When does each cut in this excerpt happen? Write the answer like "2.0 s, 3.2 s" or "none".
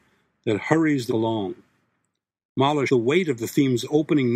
1.1 s, 2.9 s